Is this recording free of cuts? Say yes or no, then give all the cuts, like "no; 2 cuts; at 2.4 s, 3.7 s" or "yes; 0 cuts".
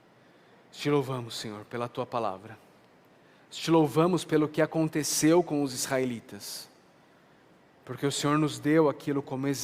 yes; 0 cuts